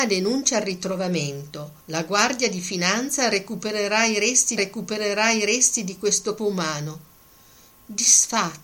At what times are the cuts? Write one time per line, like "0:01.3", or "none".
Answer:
0:01.8
0:04.6
0:06.4